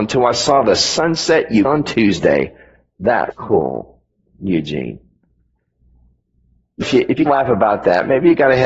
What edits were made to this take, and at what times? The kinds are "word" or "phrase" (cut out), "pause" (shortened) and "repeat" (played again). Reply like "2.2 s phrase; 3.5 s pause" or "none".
1.6 s word; 3.3 s word; 6.8 s word; 7.3 s word